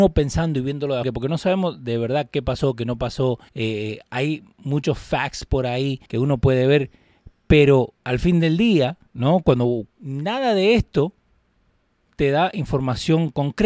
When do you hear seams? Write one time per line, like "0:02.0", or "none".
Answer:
0:01.0
0:03.5
0:06.1
0:08.0
0:09.1
0:09.9